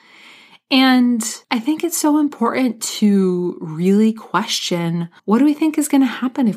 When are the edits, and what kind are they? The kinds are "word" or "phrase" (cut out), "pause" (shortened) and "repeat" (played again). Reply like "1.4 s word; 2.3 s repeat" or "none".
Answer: 1.4 s pause; 5.2 s pause